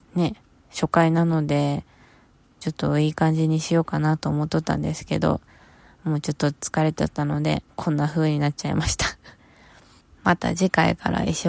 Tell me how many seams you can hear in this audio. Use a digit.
2